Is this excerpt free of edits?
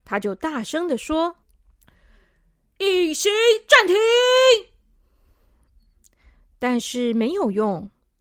no; 1 cut; at 1.4 s

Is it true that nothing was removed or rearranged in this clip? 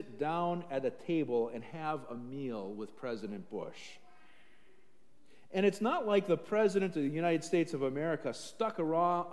yes; 0 cuts

